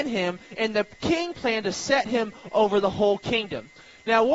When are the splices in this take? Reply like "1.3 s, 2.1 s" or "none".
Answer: none